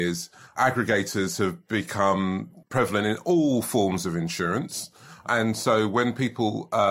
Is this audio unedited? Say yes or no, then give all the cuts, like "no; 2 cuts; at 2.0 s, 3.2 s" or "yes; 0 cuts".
no; 1 cut; at 2.6 s